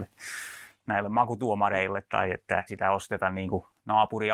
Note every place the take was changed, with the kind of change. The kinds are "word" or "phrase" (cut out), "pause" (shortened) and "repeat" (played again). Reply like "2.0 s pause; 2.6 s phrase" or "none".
2.1 s word; 2.7 s word